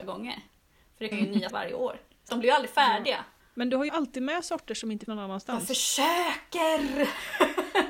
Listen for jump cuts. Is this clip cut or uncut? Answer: cut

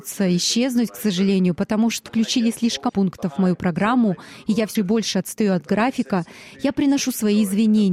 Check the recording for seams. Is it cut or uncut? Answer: cut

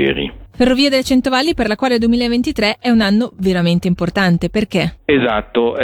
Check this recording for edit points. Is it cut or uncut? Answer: uncut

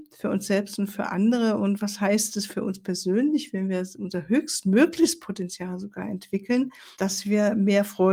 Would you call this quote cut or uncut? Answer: cut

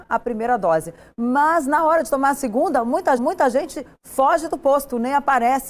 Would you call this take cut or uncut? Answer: cut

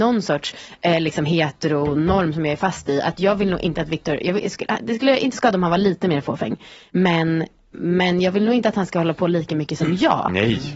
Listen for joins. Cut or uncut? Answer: cut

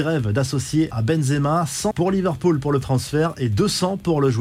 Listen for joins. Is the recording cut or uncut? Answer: cut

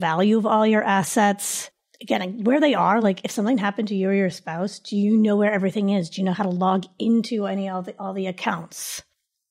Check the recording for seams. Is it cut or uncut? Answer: uncut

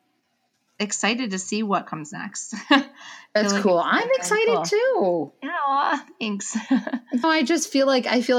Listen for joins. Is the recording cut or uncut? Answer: cut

